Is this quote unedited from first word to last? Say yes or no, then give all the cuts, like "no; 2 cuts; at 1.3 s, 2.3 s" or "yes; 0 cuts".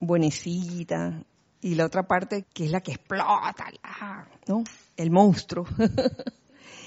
no; 1 cut; at 2.4 s